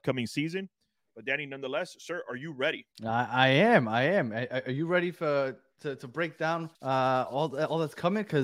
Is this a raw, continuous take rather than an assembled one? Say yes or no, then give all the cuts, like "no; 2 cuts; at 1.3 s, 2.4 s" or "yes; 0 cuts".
no; 2 cuts; at 2.9 s, 6.7 s